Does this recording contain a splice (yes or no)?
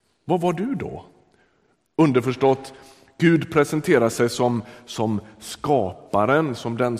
no